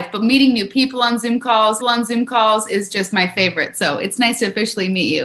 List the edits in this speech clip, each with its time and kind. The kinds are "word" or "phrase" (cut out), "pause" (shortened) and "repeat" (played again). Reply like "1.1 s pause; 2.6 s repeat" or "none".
1.8 s repeat